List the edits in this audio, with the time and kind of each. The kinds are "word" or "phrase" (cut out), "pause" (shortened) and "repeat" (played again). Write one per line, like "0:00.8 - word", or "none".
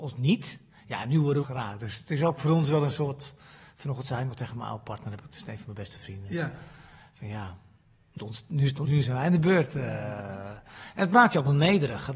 0:01.4 - word
0:08.2 - word
0:08.8 - word